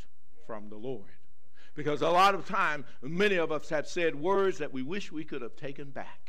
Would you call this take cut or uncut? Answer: uncut